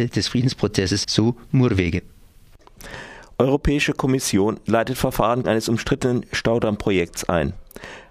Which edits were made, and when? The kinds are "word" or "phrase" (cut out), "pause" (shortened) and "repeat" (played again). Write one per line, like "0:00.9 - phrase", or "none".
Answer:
0:01.0 - word
0:05.4 - phrase